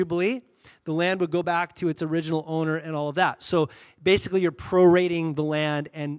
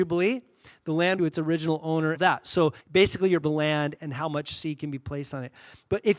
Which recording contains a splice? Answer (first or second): second